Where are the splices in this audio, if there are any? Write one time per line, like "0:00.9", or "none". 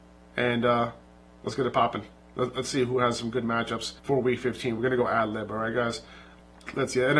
0:04.0